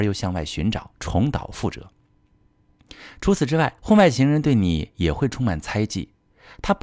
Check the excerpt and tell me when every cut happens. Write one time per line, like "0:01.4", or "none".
0:00.9
0:03.8